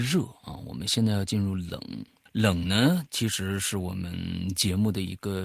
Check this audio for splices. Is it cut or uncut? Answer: cut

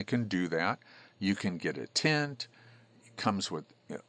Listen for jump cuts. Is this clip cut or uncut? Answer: uncut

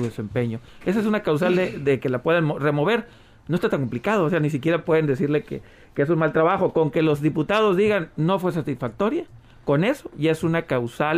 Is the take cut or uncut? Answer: uncut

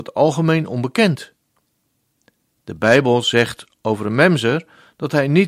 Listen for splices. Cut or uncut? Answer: uncut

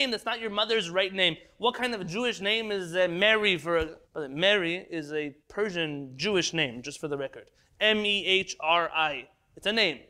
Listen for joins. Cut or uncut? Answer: cut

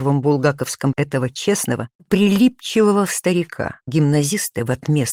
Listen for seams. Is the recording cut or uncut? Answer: cut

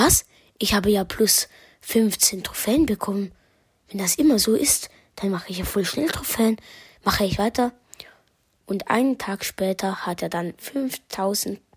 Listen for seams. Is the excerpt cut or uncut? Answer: uncut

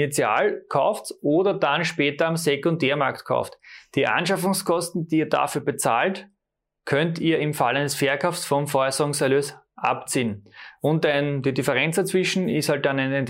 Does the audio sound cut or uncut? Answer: uncut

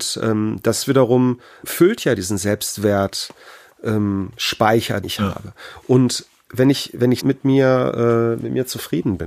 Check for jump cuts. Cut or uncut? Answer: cut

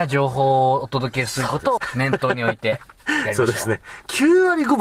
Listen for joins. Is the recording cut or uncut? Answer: cut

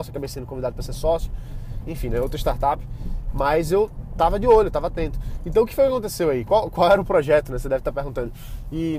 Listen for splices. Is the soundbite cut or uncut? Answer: uncut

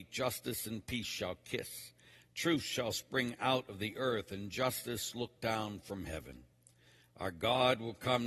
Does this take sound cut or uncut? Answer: uncut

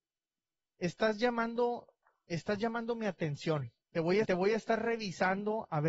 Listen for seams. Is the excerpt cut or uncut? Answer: cut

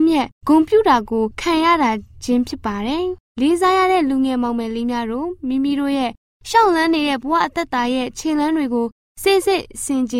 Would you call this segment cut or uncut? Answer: uncut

